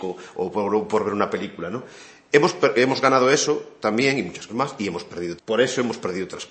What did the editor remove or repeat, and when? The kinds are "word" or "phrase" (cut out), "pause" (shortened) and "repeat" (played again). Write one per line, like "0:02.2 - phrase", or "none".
0:04.5 - word
0:05.4 - word